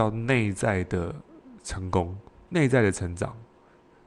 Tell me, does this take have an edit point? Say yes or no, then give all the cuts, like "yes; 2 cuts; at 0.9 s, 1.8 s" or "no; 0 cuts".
no; 0 cuts